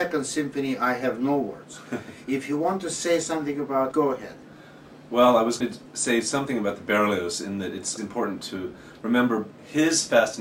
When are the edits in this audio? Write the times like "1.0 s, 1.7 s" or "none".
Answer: 3.9 s, 5.6 s, 8.0 s